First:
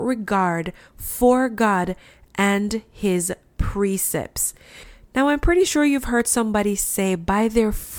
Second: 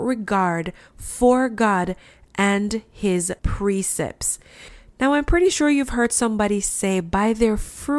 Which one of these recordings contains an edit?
second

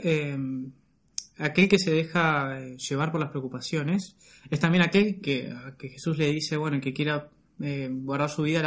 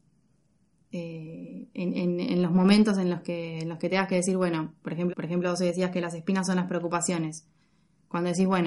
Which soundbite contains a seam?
second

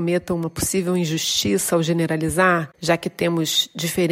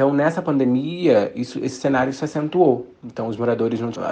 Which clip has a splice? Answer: first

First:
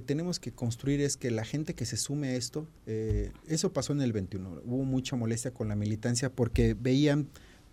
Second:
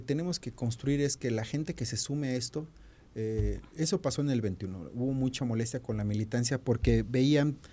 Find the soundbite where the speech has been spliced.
first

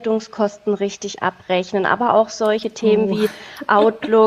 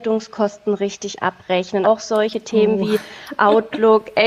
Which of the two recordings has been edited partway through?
second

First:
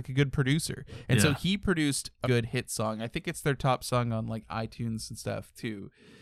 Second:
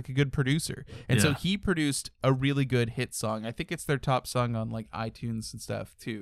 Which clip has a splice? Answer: first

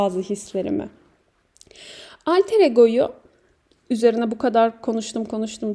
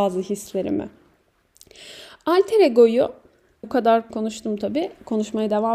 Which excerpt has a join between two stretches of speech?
second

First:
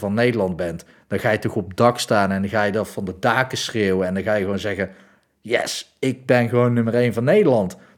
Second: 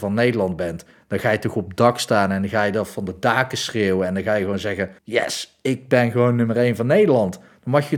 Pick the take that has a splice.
second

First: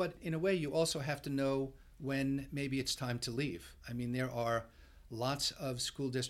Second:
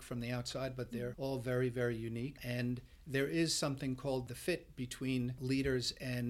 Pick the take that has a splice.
second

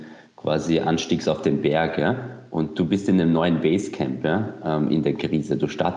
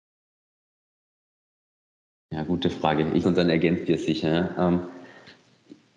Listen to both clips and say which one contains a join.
second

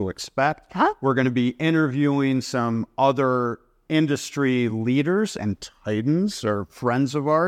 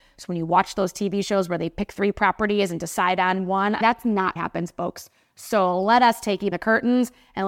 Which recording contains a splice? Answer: second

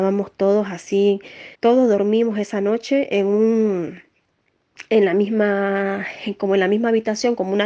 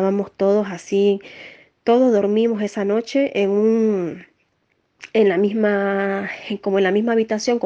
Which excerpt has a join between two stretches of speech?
first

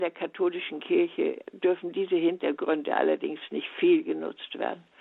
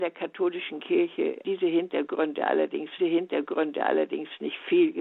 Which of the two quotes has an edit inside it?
second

